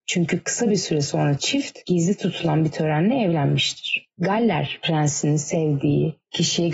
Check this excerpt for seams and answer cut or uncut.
uncut